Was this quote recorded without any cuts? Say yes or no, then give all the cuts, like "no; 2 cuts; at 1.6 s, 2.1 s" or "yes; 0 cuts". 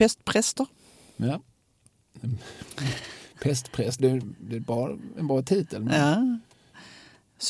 no; 1 cut; at 4.0 s